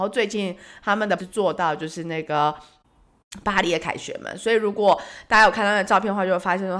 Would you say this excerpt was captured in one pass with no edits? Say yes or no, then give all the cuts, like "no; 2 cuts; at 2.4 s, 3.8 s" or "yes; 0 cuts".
no; 1 cut; at 1.2 s